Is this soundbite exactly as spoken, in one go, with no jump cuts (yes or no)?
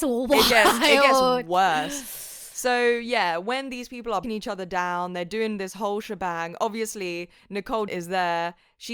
no